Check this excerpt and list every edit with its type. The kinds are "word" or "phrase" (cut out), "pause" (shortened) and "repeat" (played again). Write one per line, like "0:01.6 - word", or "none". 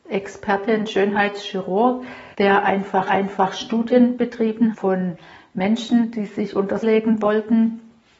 0:02.3 - pause
0:03.1 - repeat
0:04.7 - phrase
0:06.8 - word